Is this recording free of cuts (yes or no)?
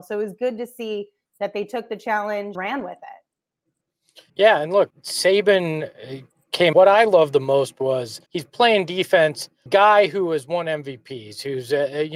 no